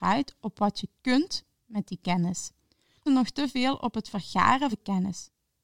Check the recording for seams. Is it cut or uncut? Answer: cut